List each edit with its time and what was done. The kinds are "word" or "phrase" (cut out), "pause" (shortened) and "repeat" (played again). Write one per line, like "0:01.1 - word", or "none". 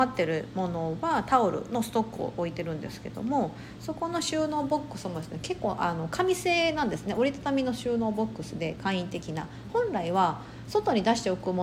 none

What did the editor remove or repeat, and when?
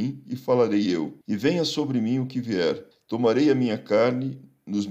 0:01.2 - pause
0:02.9 - pause

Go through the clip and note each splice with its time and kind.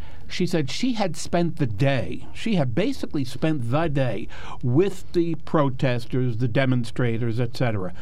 none

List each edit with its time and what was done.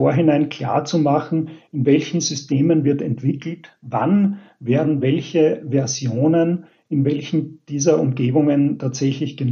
none

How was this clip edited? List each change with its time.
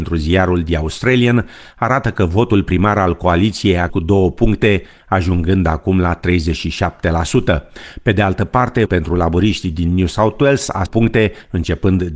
0:03.9 - word
0:08.9 - word
0:10.9 - phrase

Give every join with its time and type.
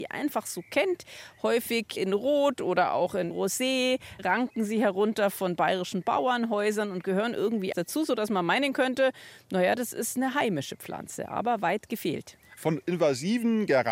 0:07.7 - word

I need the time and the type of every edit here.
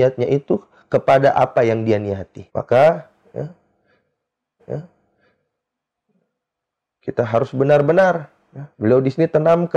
0:02.5 - pause
0:04.6 - repeat
0:08.7 - pause

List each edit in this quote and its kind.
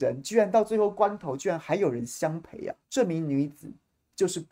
0:02.8 - pause

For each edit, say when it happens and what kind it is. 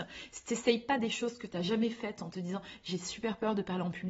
none

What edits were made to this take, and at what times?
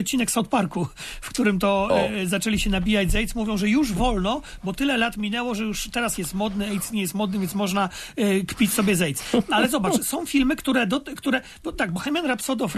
0:06.2 - word

